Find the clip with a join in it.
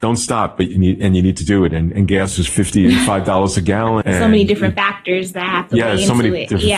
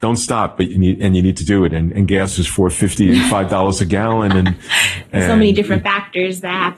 first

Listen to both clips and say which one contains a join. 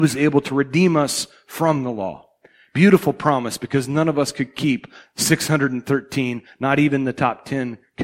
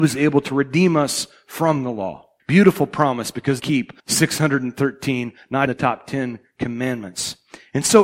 second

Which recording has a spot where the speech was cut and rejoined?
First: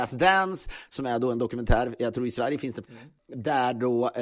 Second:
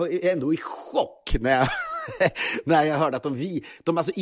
first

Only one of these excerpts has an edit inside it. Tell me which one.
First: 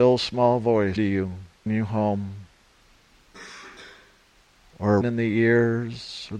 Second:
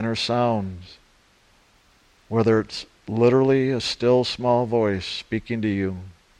first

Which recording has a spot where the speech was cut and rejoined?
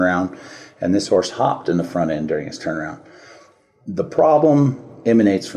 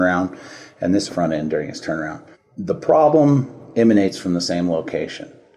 second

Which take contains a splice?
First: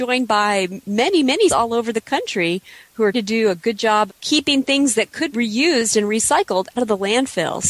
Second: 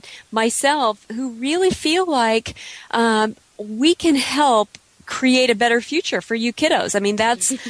first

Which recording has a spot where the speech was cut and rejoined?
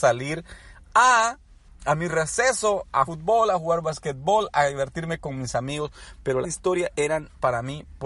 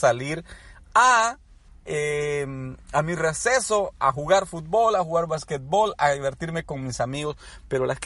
first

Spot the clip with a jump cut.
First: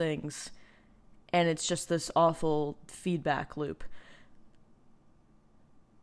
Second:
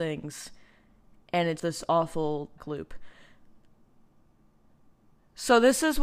second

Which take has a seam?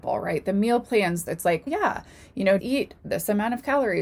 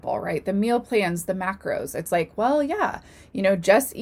first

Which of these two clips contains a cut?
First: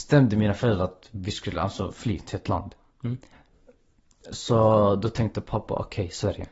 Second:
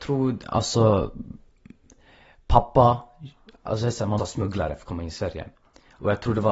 second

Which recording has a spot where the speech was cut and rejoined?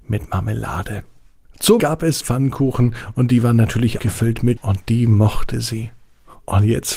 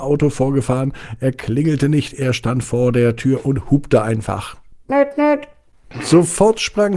first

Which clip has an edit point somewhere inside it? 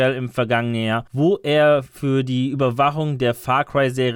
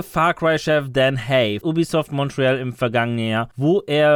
second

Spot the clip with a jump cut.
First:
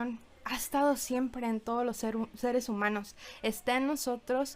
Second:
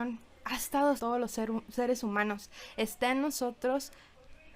second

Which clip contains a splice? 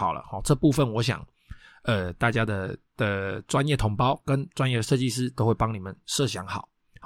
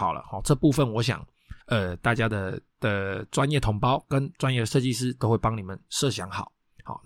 second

